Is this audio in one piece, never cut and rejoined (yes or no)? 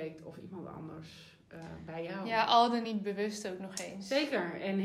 yes